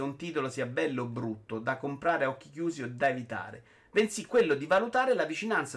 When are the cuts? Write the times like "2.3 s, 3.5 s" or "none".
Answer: none